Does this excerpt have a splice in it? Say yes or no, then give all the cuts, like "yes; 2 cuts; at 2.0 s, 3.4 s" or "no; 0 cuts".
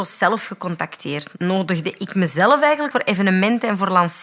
yes; 1 cut; at 2.9 s